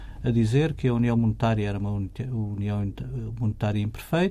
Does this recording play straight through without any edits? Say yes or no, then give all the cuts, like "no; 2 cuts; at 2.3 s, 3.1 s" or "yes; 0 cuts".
yes; 0 cuts